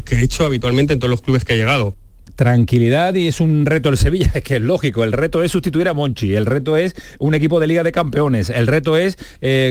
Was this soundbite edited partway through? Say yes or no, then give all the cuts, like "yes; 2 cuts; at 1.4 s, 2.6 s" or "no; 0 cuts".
no; 0 cuts